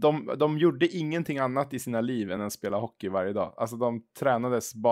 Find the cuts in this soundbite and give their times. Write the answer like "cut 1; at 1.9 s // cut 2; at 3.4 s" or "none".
none